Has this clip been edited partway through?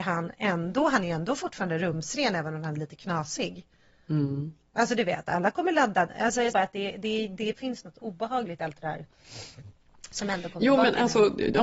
yes; 1 cut; at 6.5 s

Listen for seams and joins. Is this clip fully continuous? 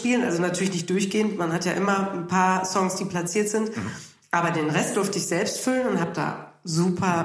yes; 0 cuts

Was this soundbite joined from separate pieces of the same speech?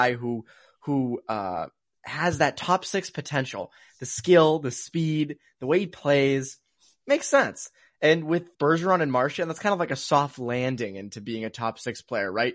yes; 1 cut; at 8.5 s

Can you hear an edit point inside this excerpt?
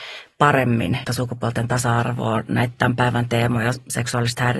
yes; 1 cut; at 1.0 s

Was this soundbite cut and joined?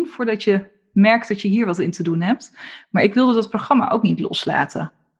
no; 0 cuts

